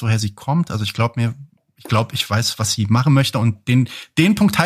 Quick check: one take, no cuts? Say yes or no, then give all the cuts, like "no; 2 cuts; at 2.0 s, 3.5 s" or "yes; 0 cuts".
yes; 0 cuts